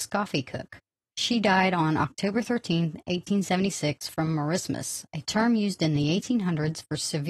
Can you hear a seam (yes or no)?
no